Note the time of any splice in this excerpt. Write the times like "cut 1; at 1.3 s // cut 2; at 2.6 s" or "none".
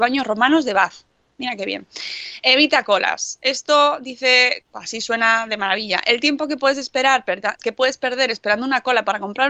cut 1; at 4.6 s // cut 2; at 7.6 s